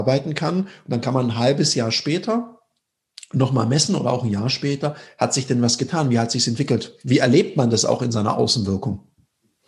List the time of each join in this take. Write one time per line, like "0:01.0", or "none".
none